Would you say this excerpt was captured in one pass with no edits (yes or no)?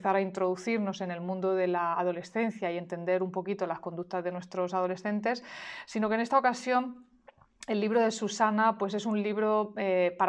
yes